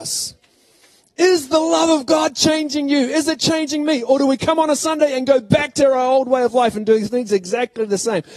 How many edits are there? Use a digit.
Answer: 0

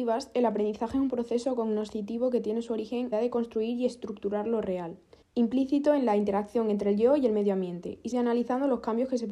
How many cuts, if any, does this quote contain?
3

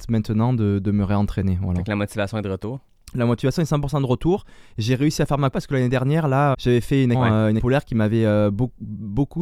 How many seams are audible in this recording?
4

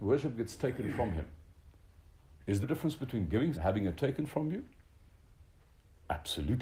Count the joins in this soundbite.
2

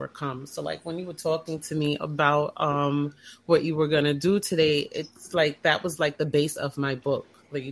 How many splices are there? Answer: 0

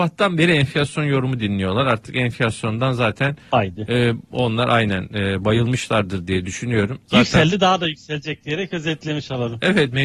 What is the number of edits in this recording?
1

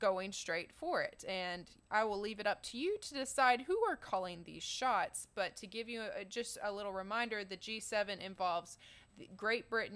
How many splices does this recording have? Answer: 0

